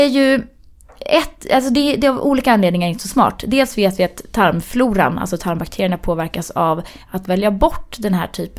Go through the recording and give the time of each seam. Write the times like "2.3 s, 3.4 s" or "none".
none